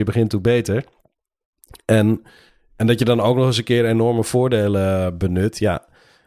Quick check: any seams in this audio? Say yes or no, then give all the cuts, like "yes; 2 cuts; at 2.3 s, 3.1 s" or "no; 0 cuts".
no; 0 cuts